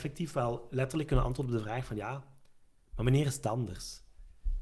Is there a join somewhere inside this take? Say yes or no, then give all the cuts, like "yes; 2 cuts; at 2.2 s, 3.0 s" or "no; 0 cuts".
no; 0 cuts